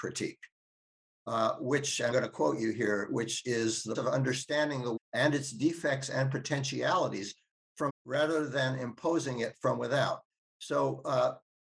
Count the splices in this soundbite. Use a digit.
4